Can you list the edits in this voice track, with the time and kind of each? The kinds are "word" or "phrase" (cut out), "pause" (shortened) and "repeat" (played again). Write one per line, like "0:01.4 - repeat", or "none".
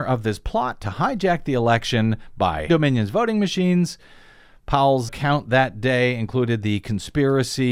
0:02.7 - word
0:05.1 - word

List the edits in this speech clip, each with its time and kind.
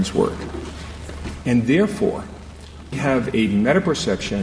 0:02.9 - word

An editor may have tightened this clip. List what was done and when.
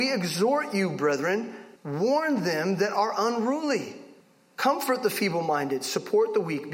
0:01.8 - pause
0:04.2 - pause

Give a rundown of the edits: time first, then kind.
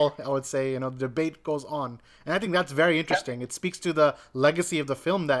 none

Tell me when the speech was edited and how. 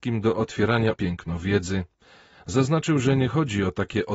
0:00.9 - phrase

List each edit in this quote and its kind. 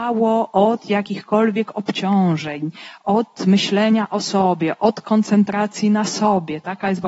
none

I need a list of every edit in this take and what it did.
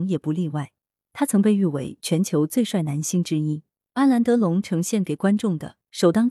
none

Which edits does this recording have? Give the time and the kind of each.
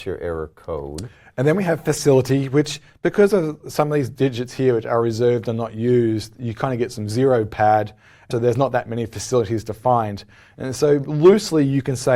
0:08.3 - word

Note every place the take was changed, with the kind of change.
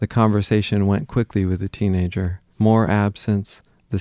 0:02.5 - pause

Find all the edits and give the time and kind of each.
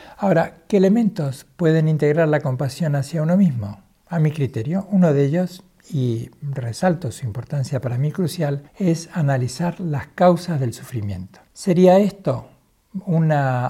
0:08.7 - pause
0:11.5 - pause

